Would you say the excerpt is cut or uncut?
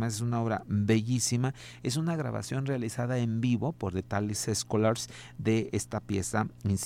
uncut